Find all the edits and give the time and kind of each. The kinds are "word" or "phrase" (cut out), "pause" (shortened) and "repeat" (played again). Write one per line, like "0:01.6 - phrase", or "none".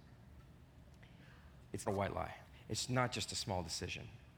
0:01.9 - word
0:02.4 - pause